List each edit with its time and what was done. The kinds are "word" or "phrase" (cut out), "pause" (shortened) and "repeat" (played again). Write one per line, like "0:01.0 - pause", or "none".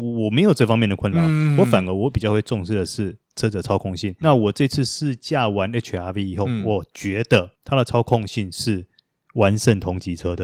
0:04.2 - word
0:07.5 - pause